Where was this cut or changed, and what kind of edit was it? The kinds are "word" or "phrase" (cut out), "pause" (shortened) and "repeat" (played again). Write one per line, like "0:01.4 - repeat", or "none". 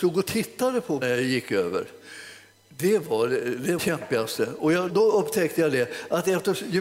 0:01.0 - word
0:03.8 - phrase
0:04.9 - word